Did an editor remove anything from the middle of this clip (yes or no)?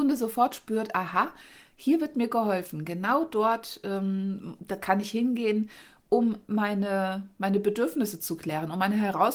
no